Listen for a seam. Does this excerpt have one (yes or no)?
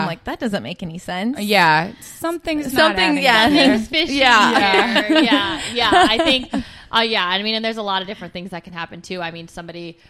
no